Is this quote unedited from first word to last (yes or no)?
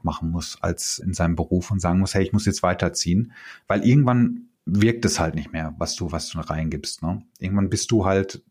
no